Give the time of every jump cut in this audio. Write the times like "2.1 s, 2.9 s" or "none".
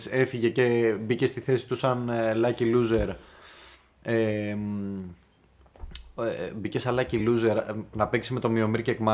none